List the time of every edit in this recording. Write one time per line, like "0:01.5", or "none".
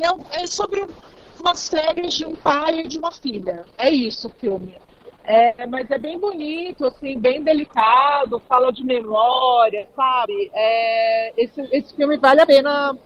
none